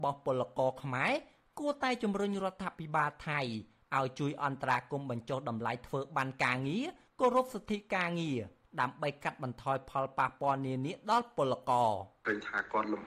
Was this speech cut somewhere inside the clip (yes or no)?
no